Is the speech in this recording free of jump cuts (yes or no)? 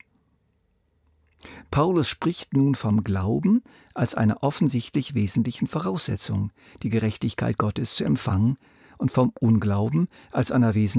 yes